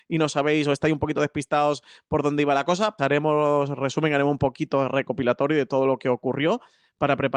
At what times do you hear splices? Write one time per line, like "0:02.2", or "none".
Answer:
0:03.0